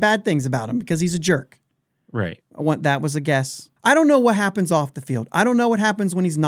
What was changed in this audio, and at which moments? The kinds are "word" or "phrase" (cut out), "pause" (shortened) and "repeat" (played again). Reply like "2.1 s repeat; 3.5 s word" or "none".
3.8 s pause